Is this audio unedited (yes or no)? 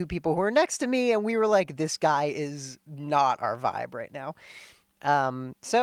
yes